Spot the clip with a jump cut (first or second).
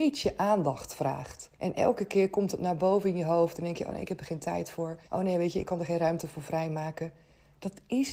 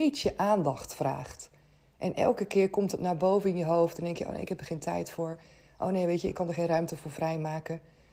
first